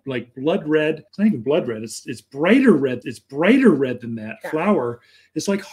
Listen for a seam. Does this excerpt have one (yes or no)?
yes